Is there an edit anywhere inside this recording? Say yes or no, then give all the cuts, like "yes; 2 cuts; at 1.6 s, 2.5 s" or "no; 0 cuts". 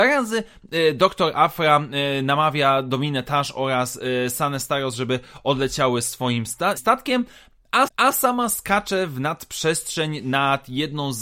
yes; 2 cuts; at 6.8 s, 7.9 s